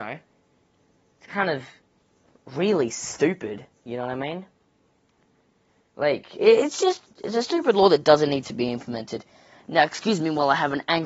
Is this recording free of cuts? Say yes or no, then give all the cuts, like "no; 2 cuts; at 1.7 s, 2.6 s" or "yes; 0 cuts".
yes; 0 cuts